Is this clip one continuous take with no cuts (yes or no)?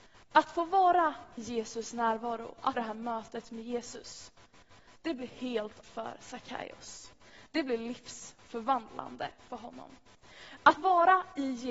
no